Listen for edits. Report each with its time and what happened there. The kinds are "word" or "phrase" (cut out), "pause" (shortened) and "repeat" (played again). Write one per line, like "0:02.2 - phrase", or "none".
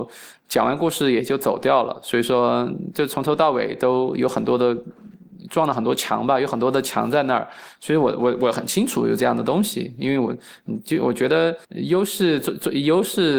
0:11.6 - pause